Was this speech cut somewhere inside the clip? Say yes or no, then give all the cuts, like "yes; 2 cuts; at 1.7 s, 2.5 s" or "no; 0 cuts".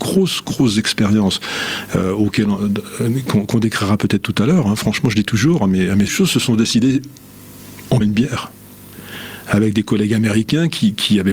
yes; 2 cuts; at 6.1 s, 8.0 s